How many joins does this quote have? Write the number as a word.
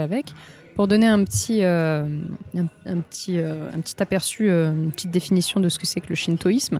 zero